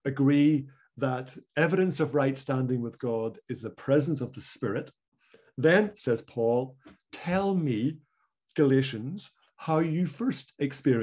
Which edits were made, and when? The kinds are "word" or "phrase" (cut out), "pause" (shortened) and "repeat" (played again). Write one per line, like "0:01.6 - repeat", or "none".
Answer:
none